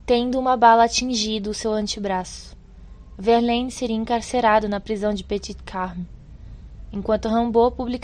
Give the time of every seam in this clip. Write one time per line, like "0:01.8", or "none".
none